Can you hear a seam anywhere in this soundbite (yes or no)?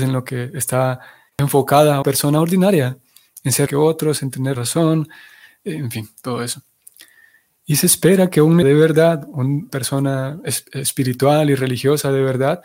yes